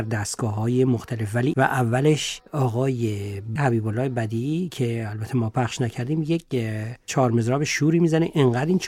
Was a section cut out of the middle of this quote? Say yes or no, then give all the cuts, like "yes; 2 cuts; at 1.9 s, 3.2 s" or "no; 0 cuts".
yes; 2 cuts; at 1.5 s, 3.6 s